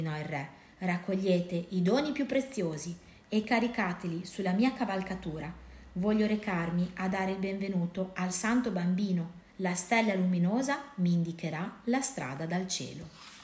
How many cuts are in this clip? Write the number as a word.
one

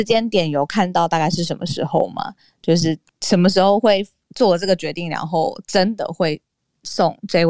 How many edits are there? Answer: zero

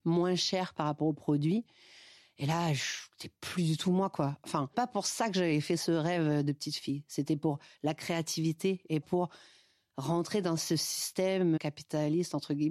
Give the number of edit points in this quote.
three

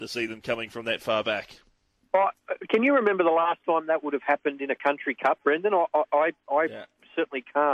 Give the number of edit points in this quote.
zero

